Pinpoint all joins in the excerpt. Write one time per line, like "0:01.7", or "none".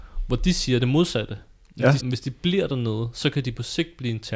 0:02.0

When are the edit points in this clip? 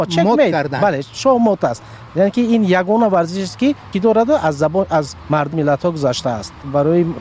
0:03.9
0:05.5

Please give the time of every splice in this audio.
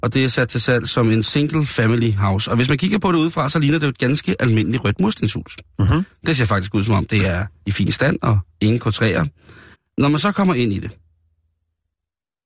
0:09.7

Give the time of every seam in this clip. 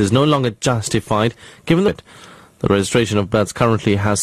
0:01.9

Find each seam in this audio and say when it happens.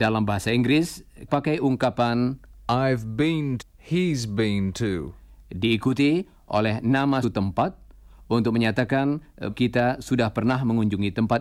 0:01.3
0:03.6
0:07.2
0:09.5

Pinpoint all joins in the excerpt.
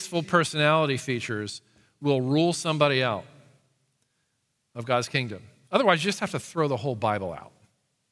none

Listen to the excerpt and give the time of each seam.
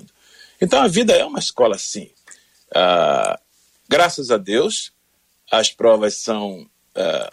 none

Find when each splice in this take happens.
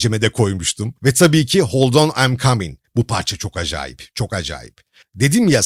0:01.0
0:02.9

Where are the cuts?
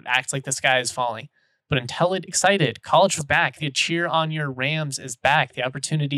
0:02.3
0:03.2
0:03.6

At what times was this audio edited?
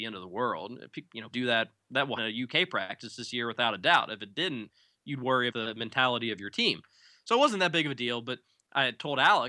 0:01.3
0:02.2
0:05.5

